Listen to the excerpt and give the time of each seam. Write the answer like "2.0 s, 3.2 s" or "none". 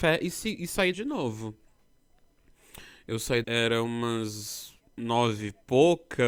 0.9 s, 3.4 s, 4.8 s